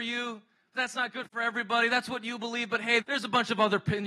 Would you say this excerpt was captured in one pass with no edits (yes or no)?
no